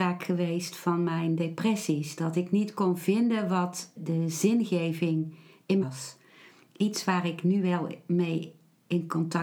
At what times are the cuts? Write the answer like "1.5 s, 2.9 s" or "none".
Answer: 4.0 s, 5.8 s